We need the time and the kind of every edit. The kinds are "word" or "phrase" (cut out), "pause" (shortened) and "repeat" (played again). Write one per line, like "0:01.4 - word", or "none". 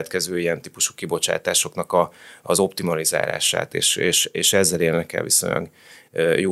none

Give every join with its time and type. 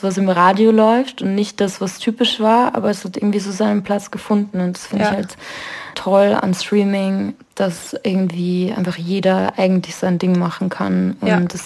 0:05.9 - word

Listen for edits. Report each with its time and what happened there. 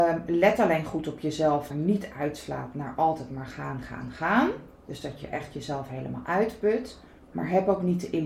0:01.7 - phrase
0:07.1 - pause

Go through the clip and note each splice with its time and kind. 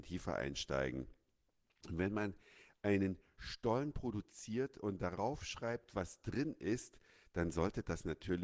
none

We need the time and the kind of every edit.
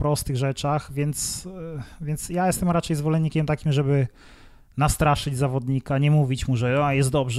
none

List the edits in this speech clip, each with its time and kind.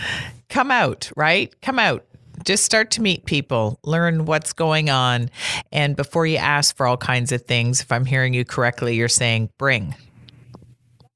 none

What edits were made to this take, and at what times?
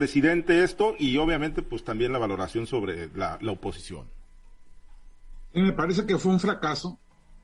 none

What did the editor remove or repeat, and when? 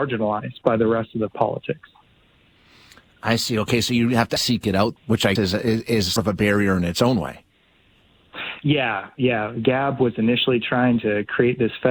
0:01.3 - phrase
0:04.4 - word
0:05.0 - word
0:05.4 - word
0:06.2 - word

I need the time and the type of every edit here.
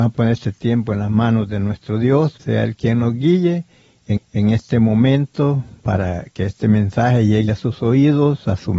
0:02.4 - phrase
0:04.2 - repeat
0:07.5 - word

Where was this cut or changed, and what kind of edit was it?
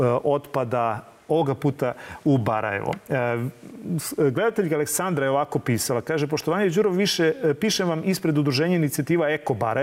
none

